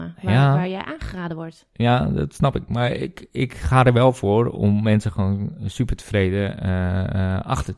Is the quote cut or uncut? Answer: uncut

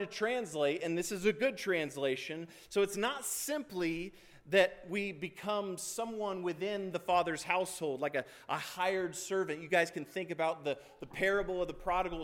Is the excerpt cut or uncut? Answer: uncut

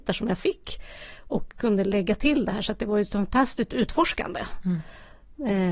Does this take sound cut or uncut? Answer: uncut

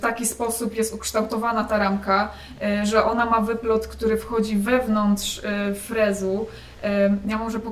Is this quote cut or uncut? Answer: uncut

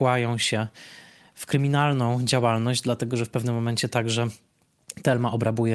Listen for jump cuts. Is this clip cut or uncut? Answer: uncut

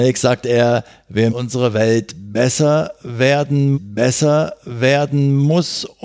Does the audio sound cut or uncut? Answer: cut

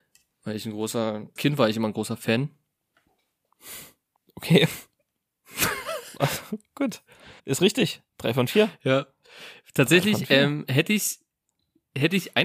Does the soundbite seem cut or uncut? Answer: cut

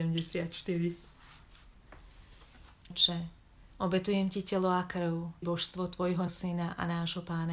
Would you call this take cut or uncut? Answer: cut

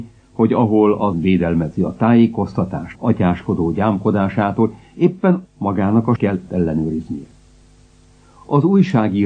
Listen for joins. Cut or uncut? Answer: cut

